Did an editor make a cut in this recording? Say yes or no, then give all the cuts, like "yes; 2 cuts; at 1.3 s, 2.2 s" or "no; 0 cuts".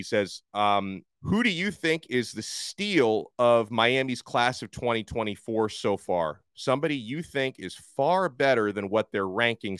yes; 1 cut; at 1.1 s